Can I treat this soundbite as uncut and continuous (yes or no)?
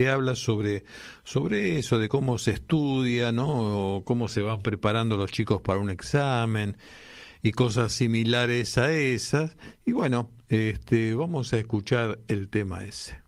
yes